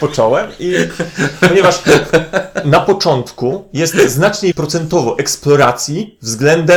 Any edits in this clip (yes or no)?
yes